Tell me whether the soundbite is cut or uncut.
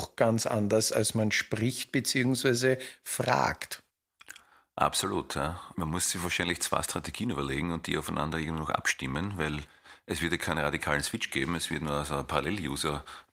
uncut